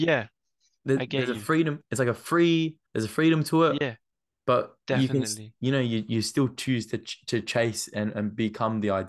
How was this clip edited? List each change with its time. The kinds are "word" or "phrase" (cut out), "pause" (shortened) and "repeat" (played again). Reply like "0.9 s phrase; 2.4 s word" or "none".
2.9 s pause